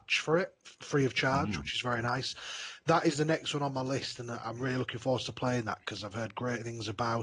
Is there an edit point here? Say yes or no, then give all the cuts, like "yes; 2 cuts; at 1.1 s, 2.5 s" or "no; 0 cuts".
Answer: no; 0 cuts